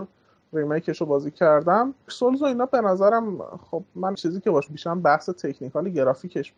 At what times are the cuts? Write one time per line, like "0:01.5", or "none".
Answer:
0:02.1
0:04.1
0:04.7